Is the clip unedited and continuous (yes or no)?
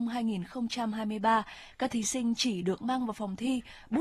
yes